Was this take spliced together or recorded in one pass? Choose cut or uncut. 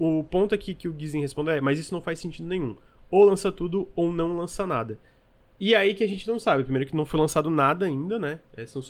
uncut